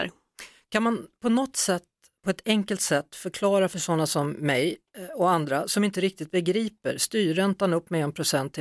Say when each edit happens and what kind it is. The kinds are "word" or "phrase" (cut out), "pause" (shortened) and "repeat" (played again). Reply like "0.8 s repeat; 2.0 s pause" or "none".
none